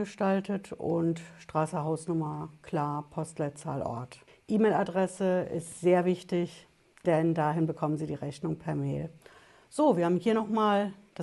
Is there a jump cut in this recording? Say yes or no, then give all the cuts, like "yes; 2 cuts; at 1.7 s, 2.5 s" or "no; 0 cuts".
no; 0 cuts